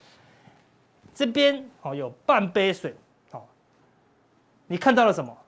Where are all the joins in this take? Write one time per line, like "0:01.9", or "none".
none